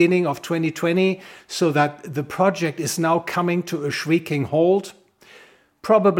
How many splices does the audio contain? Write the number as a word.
zero